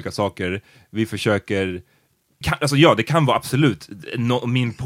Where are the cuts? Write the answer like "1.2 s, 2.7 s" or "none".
2.4 s